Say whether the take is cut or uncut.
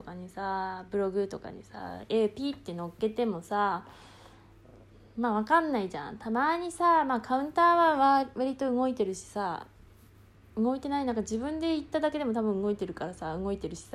uncut